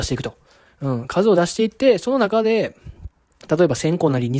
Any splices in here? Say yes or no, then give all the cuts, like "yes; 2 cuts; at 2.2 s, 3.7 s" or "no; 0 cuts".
no; 0 cuts